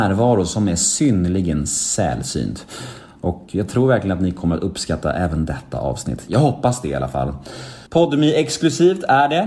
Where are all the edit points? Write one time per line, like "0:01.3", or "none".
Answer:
0:07.9